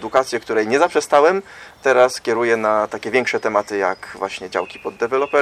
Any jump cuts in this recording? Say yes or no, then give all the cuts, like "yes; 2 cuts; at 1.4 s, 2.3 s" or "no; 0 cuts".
no; 0 cuts